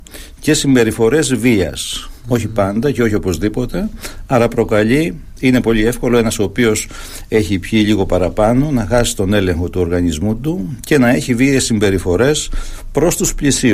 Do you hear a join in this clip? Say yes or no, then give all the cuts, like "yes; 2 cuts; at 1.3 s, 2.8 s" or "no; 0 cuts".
no; 0 cuts